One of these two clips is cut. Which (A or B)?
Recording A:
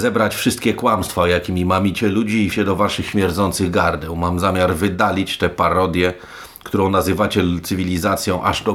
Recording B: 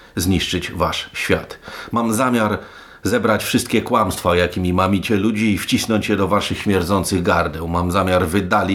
A